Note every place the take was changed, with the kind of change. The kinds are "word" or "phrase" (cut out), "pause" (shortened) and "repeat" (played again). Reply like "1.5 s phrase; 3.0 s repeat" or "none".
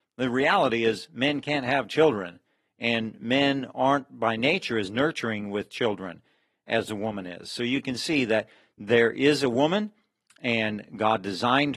none

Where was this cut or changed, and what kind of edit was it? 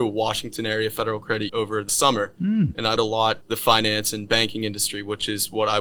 1.5 s word; 1.9 s word; 3.0 s word; 3.4 s word

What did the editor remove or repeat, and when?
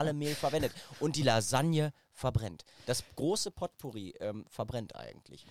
none

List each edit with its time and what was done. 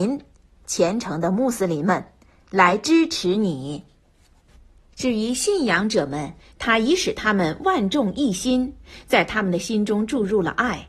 none

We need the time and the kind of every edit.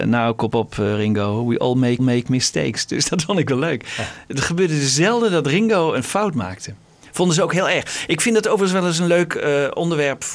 2.0 s repeat

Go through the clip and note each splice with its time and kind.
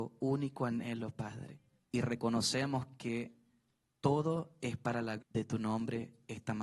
1.8 s pause; 5.2 s word

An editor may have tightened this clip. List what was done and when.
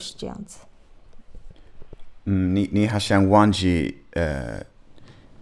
none

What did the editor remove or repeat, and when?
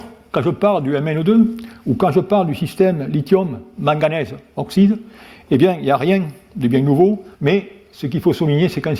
7.3 s pause

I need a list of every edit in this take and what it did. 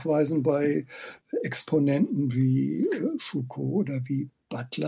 none

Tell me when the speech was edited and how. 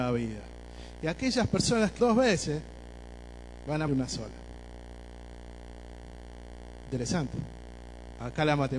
2.0 s word; 3.9 s word

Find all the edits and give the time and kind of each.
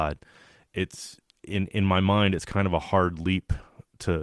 none

